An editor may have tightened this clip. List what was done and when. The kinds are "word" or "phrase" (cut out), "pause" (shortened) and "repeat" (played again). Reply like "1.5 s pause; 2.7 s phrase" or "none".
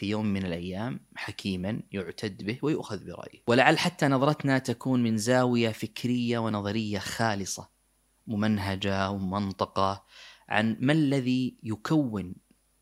none